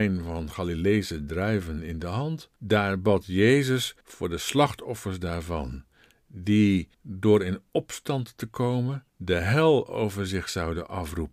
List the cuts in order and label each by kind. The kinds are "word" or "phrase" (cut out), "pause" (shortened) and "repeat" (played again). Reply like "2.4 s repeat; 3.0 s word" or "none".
2.6 s pause; 4.0 s pause; 6.9 s pause; 9.1 s pause